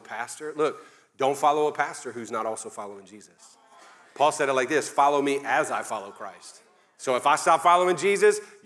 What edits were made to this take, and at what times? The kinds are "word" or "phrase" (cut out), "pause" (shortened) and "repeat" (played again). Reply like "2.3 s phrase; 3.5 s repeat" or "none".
none